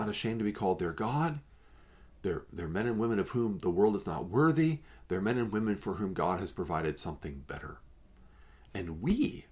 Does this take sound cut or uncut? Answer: uncut